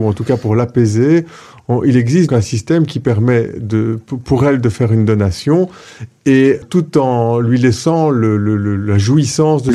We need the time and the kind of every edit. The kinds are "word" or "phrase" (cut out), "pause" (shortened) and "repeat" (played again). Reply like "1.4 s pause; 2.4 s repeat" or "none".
2.3 s word; 6.6 s word